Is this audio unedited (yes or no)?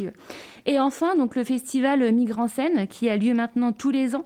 yes